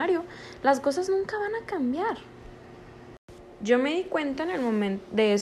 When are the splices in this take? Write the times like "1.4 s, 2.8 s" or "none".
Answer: none